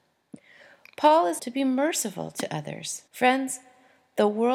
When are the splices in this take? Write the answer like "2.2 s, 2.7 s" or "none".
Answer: 1.4 s, 3.1 s

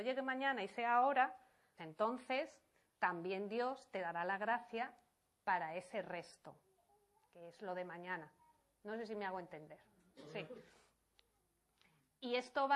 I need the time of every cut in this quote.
1.8 s

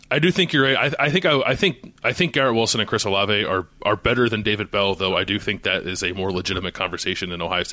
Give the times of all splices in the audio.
none

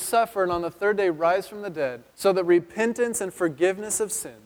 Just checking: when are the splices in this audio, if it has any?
2.1 s

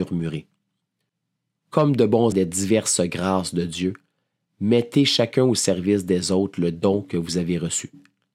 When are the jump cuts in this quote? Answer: 2.3 s

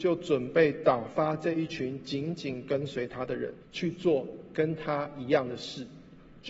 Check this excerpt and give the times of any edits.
3.6 s

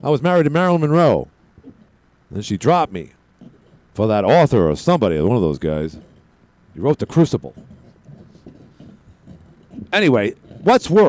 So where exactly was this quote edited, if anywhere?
none

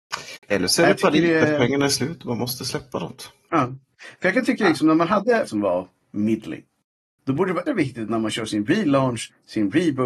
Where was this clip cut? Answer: 5.5 s, 7.7 s

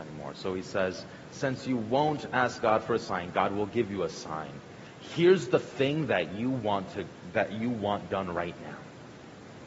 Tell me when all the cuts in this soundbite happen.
none

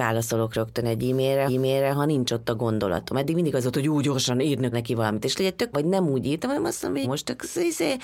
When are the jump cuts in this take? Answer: 1.5 s, 4.7 s, 5.3 s, 5.7 s, 7.0 s

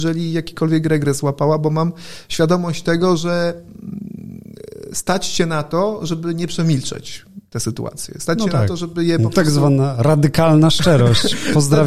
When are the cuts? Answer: none

